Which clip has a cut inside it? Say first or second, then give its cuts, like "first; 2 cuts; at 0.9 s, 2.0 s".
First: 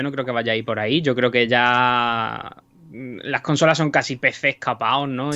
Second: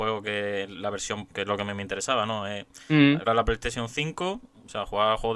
second; 2 cuts; at 1.3 s, 3.3 s